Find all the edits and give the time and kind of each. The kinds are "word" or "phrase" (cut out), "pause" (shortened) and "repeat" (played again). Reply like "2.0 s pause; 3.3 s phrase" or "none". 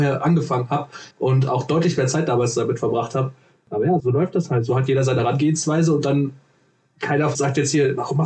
1.1 s pause; 4.0 s word; 5.2 s word; 7.3 s word

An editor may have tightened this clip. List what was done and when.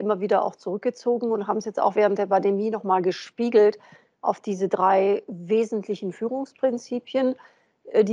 none

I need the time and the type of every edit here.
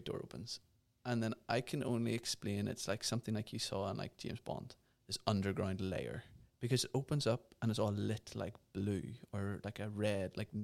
5.0 s word; 6.5 s pause

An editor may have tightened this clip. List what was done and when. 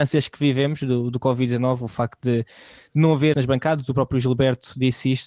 3.3 s word

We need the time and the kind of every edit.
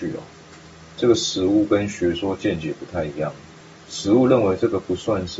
none

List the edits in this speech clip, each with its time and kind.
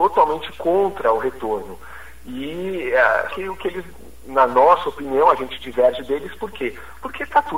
3.3 s word

